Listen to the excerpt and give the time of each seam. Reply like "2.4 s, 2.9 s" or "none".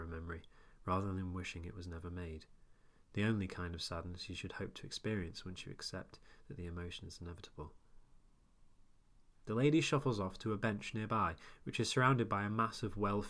none

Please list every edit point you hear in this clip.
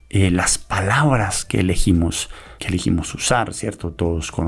2.6 s

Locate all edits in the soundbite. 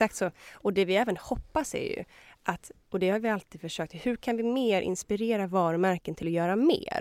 none

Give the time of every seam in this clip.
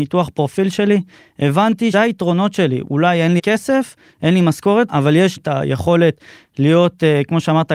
1.9 s, 3.4 s, 4.9 s, 5.4 s

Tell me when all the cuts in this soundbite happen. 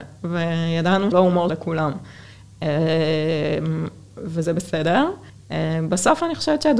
1.1 s, 1.5 s, 5.3 s

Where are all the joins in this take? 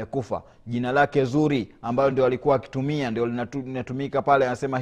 none

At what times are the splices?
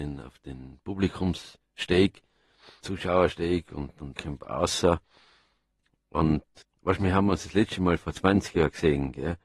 2.8 s, 4.2 s, 6.6 s

